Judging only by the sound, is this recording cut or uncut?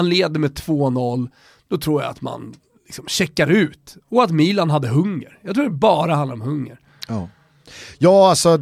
uncut